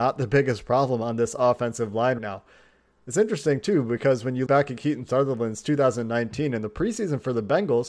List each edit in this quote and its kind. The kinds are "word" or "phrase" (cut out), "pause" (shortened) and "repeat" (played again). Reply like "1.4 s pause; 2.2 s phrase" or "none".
2.2 s word; 4.5 s word